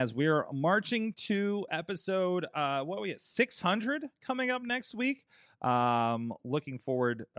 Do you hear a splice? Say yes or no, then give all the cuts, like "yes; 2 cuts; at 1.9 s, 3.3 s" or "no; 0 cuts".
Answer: no; 0 cuts